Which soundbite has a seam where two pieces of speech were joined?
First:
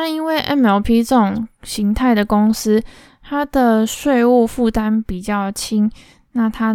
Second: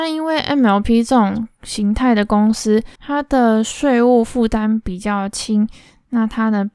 second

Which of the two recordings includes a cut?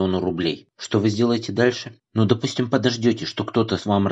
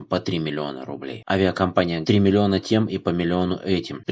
second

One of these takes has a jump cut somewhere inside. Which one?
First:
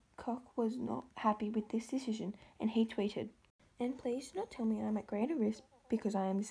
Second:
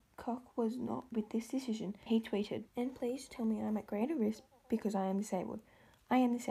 second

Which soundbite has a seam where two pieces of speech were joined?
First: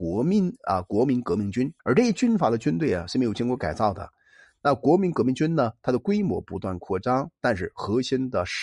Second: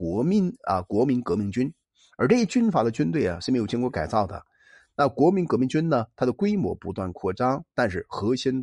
first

